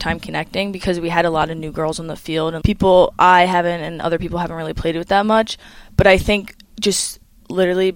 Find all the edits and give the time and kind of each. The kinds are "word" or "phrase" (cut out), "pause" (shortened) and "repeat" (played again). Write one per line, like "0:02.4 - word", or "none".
0:02.6 - word